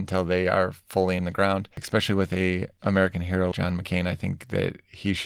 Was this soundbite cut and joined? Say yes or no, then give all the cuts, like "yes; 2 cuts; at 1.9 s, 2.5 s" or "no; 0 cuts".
yes; 3 cuts; at 1.2 s, 1.7 s, 3.5 s